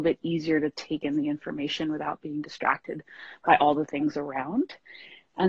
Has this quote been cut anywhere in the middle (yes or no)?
no